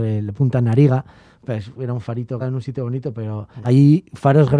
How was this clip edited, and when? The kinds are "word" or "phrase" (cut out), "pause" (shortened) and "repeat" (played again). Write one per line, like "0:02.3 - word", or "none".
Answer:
0:02.4 - word
0:03.5 - pause